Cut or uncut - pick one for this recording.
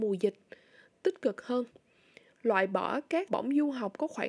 cut